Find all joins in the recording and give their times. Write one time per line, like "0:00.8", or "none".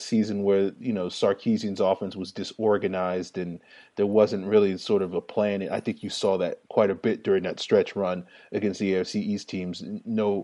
none